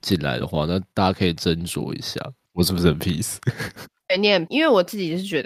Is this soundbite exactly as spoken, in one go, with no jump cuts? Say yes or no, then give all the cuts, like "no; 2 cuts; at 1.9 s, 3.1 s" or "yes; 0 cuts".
no; 1 cut; at 4.5 s